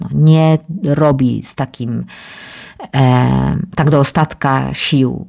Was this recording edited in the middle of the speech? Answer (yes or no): no